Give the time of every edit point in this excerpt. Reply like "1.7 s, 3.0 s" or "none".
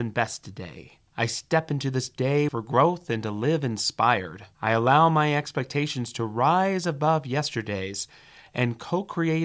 1.1 s, 2.5 s, 4.5 s

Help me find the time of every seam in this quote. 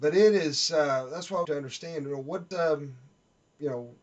1.4 s, 2.5 s

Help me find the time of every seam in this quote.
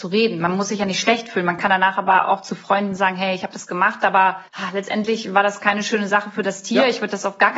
4.5 s

